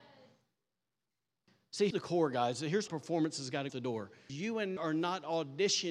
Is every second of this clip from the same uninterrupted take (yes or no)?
no